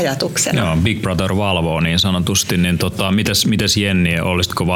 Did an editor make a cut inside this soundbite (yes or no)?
no